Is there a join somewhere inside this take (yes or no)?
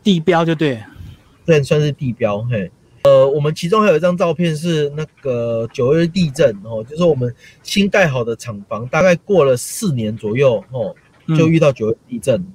no